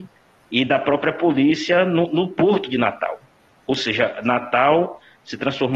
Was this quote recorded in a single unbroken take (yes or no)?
yes